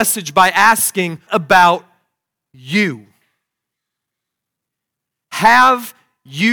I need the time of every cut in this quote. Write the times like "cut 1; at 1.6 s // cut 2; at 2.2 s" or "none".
cut 1; at 1.3 s